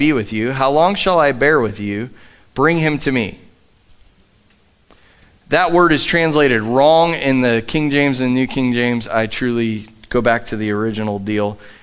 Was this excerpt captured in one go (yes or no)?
yes